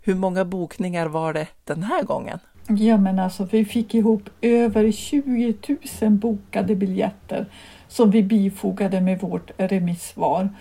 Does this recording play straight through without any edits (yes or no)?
yes